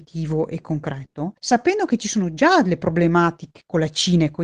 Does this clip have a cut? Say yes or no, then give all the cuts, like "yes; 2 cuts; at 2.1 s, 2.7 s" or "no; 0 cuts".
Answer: yes; 1 cut; at 1.4 s